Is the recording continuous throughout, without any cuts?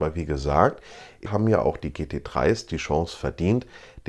no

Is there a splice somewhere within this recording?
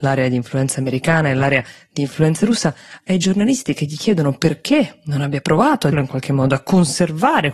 yes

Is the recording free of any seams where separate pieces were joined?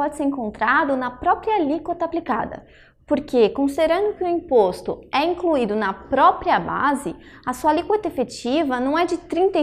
yes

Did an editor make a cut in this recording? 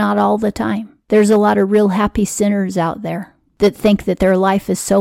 no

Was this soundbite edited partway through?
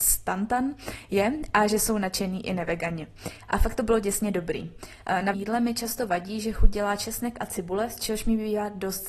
yes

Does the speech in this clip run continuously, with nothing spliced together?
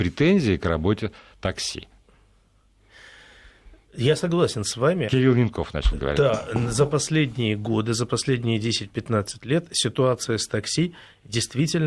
yes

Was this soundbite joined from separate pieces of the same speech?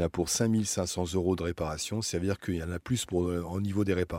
no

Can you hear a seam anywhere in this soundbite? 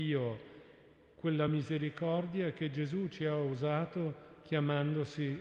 no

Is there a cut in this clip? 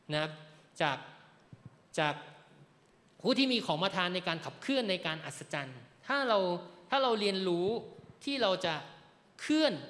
no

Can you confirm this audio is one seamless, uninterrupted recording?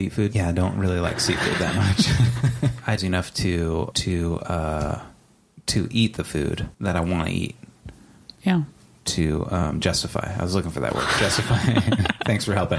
no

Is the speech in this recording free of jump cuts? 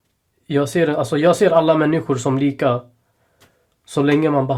yes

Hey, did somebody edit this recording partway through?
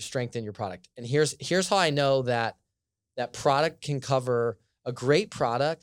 no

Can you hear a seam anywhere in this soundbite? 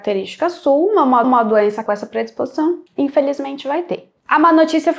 yes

